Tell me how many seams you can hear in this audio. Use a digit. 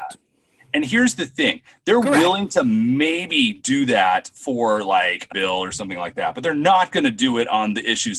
1